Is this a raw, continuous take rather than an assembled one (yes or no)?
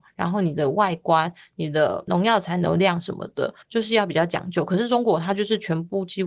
no